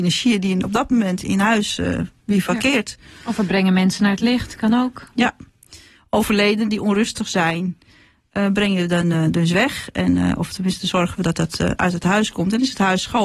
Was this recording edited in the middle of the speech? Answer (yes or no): no